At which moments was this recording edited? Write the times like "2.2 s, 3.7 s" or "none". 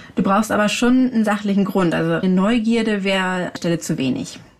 2.2 s, 3.6 s